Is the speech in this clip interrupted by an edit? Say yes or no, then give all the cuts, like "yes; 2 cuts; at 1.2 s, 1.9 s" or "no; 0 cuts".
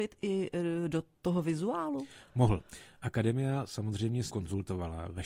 yes; 1 cut; at 4.3 s